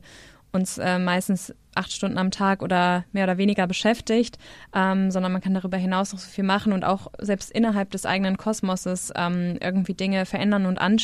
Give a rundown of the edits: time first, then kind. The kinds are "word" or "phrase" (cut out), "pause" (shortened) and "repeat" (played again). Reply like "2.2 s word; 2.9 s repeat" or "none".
none